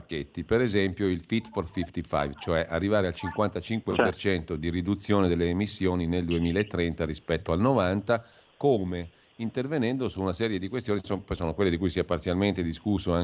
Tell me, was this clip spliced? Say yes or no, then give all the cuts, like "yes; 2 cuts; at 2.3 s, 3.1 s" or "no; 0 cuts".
no; 0 cuts